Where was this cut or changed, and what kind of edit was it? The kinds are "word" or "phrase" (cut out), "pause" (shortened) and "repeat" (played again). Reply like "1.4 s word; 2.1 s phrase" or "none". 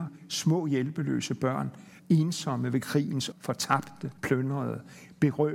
2.0 s word; 3.3 s word; 4.2 s pause